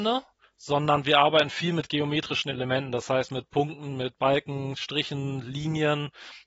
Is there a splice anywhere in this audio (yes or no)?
no